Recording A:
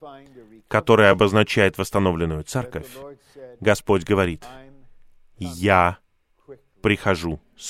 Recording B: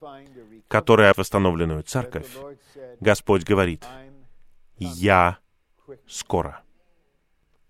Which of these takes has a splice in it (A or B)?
B